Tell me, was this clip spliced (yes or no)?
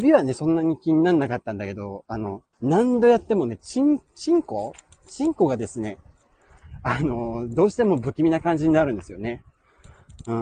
yes